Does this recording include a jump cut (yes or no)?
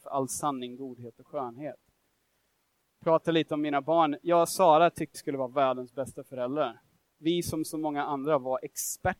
yes